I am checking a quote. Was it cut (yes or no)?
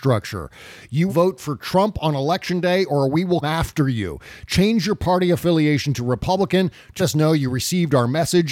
yes